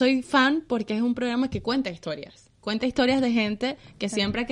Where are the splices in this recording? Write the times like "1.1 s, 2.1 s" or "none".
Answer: none